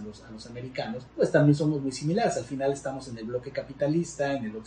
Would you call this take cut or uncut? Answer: cut